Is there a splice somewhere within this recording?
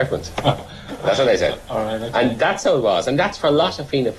no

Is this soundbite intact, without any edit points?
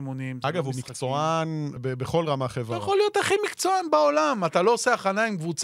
no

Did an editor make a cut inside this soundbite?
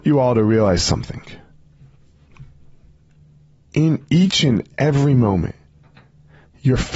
no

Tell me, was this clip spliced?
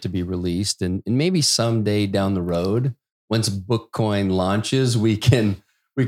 no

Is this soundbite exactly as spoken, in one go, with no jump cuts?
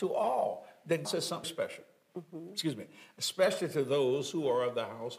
no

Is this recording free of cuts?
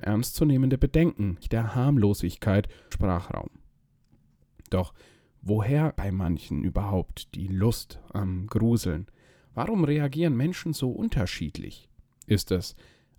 no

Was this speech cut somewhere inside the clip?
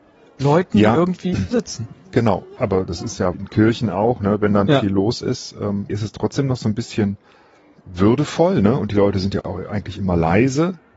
yes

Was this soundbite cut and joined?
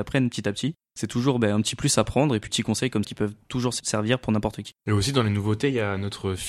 yes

